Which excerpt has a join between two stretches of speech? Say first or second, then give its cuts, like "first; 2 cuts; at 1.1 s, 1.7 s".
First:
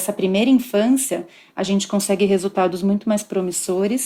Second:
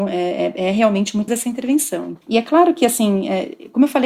second; 2 cuts; at 1.3 s, 2.2 s